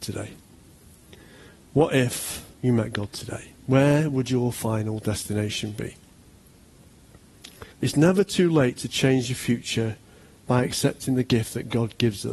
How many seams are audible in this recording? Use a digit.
3